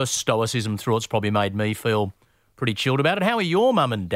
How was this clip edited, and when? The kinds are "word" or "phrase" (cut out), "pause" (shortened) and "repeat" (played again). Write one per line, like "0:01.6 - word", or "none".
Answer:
none